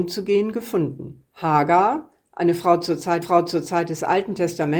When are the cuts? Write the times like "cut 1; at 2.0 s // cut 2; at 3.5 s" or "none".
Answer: cut 1; at 1.3 s // cut 2; at 3.2 s